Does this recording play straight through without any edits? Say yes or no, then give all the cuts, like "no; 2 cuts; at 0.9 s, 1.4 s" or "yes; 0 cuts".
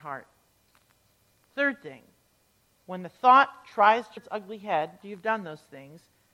no; 2 cuts; at 4.2 s, 5.0 s